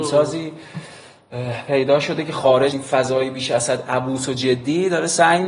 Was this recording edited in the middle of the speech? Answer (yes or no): yes